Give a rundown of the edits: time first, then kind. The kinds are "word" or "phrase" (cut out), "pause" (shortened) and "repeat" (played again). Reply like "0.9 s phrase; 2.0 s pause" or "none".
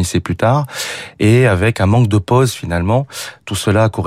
none